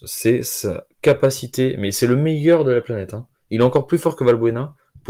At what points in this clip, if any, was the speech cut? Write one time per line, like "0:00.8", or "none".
none